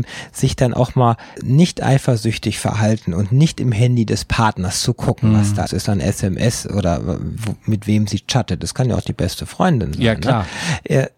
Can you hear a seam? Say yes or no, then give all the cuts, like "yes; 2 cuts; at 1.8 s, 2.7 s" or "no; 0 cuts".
yes; 2 cuts; at 1.3 s, 5.7 s